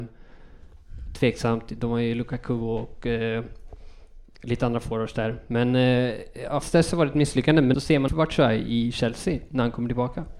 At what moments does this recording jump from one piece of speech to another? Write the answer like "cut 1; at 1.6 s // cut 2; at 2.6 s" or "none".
cut 1; at 6.6 s // cut 2; at 7.7 s // cut 3; at 8.1 s